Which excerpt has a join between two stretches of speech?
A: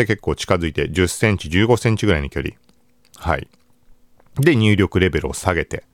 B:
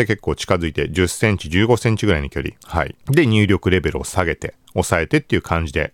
B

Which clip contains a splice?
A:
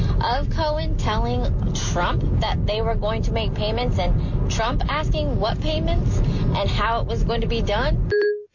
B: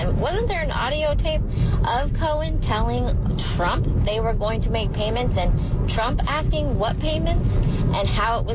B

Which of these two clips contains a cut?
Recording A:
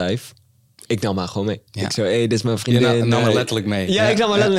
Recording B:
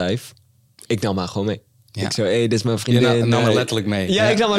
A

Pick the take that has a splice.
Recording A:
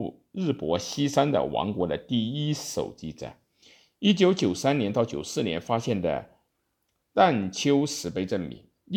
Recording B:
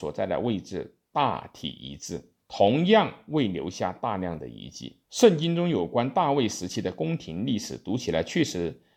B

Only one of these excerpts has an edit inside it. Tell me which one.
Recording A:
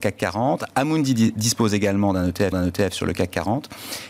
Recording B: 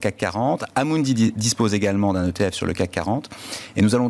A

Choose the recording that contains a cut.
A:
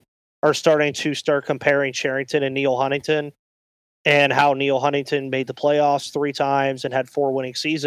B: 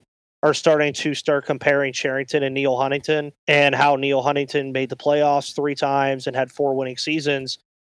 B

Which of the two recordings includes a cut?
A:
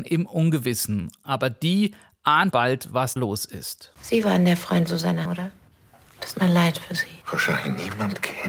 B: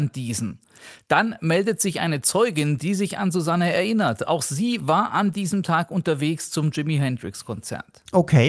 A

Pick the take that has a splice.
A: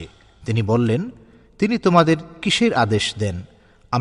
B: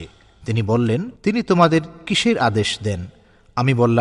B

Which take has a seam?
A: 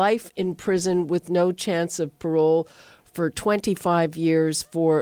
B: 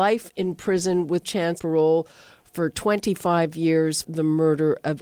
B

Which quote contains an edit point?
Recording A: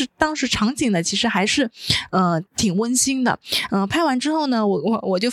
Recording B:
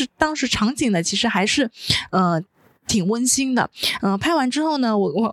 A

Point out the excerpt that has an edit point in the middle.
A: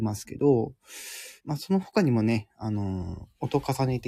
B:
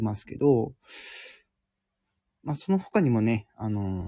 A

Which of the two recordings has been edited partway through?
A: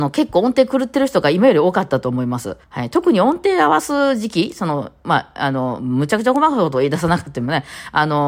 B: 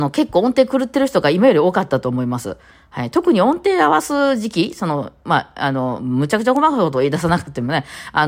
A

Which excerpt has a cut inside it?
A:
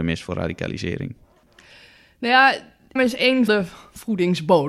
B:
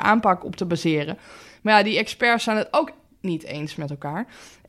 A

